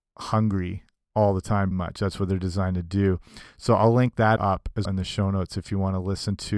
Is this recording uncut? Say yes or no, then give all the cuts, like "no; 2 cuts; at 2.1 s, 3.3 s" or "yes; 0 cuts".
no; 3 cuts; at 1.7 s, 4.4 s, 4.8 s